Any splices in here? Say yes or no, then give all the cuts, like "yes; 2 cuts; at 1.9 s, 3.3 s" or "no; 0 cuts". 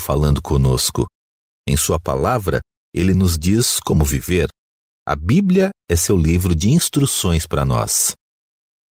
no; 0 cuts